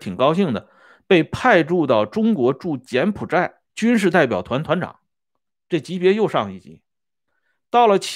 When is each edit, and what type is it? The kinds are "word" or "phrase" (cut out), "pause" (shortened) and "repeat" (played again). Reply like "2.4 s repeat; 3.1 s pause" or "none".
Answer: 3.6 s pause